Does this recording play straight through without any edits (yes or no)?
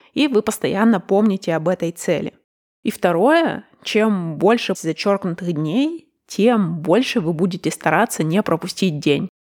no